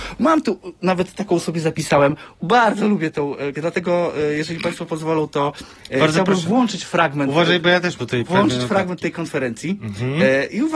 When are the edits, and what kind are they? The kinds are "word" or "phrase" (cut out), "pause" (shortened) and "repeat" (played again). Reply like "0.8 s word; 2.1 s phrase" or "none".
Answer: 2.3 s pause; 3.5 s word; 8.0 s word